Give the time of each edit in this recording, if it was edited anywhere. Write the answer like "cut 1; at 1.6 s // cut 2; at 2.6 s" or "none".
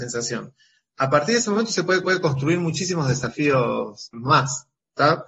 cut 1; at 2.0 s // cut 2; at 4.1 s